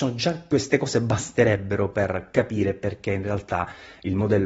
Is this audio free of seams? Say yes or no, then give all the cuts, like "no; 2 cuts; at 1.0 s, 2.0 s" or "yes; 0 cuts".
yes; 0 cuts